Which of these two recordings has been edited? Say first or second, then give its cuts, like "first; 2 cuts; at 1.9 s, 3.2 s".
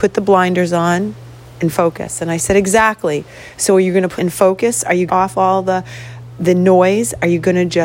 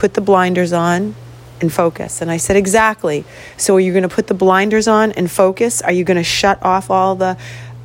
first; 2 cuts; at 4.2 s, 5.1 s